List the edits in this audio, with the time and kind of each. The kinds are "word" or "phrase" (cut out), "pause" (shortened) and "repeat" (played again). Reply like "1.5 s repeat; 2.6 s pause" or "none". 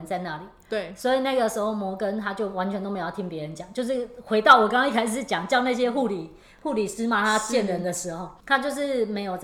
8.4 s pause